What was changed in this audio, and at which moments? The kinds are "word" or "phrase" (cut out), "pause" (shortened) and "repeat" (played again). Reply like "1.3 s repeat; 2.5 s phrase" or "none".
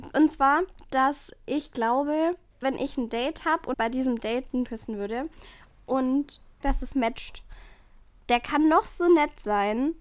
2.6 s word; 3.7 s word; 4.7 s word; 6.6 s phrase; 6.9 s word